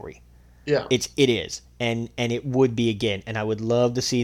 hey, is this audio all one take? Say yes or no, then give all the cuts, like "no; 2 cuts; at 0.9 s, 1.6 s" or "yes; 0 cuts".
yes; 0 cuts